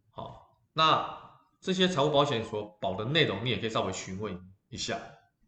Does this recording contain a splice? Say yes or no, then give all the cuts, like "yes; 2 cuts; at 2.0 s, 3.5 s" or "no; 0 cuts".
no; 0 cuts